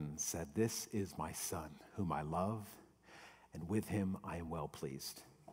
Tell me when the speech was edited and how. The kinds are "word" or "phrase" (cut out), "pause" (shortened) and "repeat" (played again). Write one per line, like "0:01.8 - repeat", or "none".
none